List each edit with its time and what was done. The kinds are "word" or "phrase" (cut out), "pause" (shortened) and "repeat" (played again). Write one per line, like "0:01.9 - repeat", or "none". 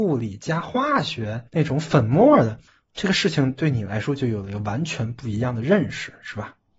0:01.5 - pause
0:02.7 - pause